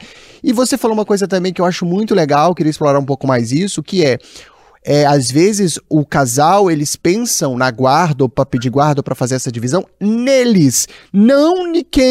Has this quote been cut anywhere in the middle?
no; 0 cuts

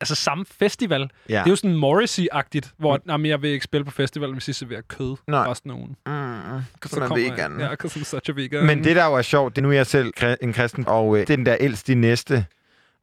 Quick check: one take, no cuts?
no; 4 cuts; at 9.6 s, 10.1 s, 10.9 s, 11.2 s

